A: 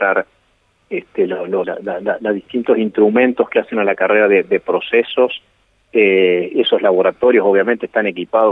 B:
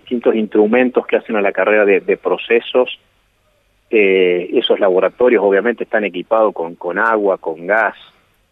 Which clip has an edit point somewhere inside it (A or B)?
A